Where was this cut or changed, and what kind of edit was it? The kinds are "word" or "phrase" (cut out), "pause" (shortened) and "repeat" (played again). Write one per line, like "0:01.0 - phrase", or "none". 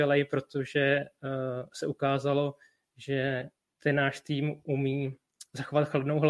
none